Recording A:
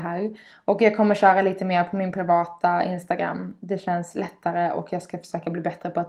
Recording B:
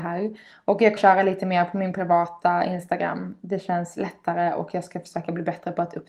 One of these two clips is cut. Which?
B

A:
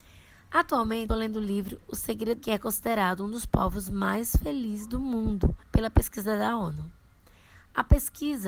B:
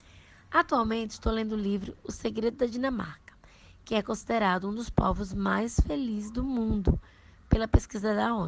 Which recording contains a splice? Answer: A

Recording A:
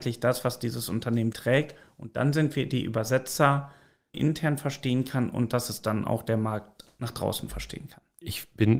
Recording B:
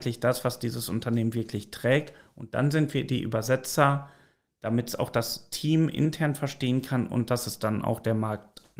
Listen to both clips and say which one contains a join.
A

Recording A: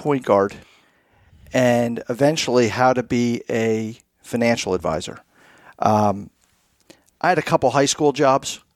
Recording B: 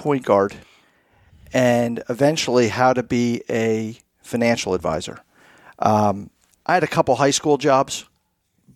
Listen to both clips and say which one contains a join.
B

